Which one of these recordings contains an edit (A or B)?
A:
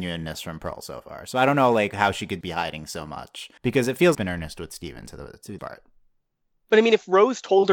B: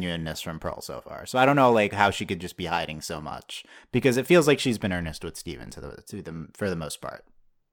A